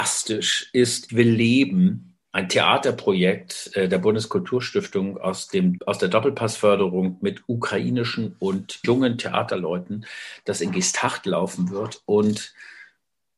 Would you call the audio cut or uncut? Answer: cut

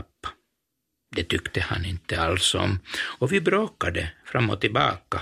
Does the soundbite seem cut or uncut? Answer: uncut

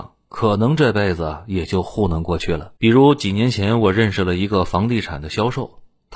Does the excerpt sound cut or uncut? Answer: cut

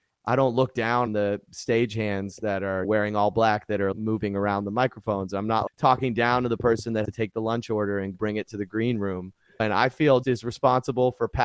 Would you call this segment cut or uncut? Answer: cut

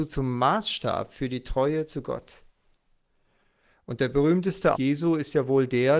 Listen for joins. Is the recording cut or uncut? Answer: cut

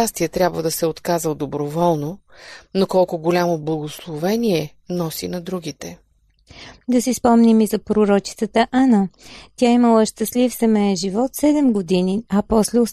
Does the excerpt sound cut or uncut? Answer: uncut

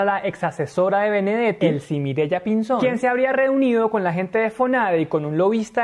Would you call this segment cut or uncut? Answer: uncut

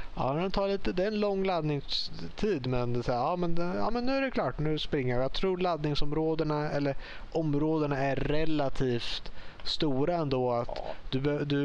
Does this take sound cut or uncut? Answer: uncut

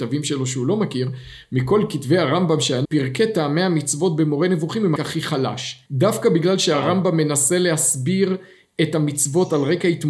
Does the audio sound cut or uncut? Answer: cut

